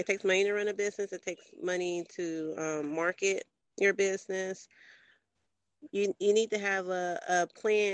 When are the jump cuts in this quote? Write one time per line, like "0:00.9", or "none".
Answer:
none